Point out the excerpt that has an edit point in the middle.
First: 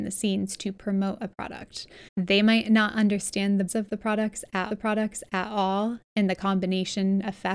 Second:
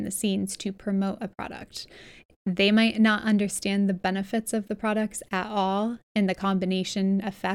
first; 3 cuts; at 2.1 s, 3.7 s, 4.7 s

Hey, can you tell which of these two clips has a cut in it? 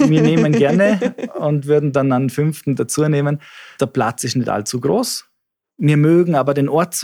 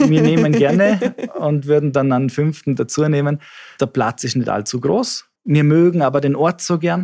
second; 1 cut; at 5.4 s

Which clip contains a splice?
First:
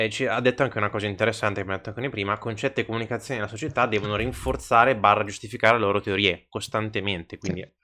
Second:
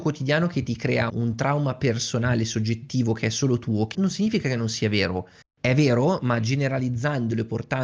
second; 3 cuts; at 1.1 s, 3.9 s, 5.4 s

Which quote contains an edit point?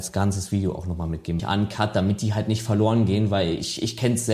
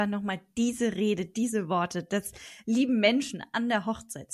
first; 1 cut; at 1.4 s

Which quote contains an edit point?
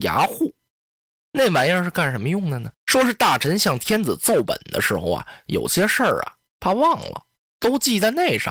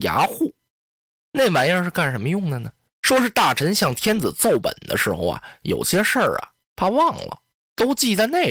first; 1 cut; at 2.7 s

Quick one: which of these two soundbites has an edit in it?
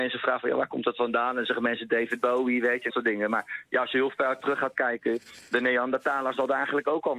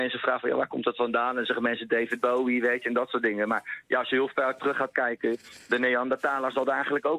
first; 1 cut; at 2.9 s

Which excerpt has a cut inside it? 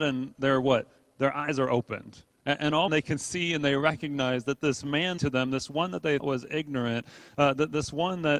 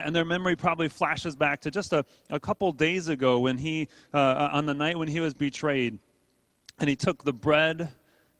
first; 3 cuts; at 2.9 s, 5.2 s, 6.2 s

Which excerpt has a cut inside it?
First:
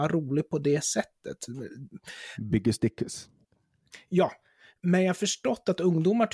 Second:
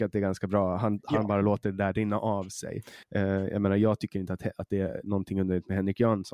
second; 1 cut; at 3.0 s

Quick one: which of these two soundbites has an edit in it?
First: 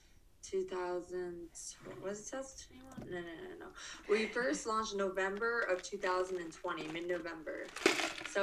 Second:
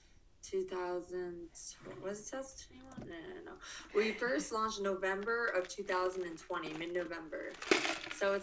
second; 1 cut; at 3.1 s

